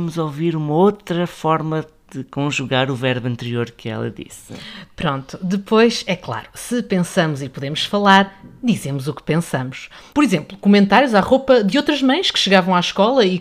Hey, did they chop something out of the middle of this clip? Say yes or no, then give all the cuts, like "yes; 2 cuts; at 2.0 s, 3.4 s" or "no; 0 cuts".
no; 0 cuts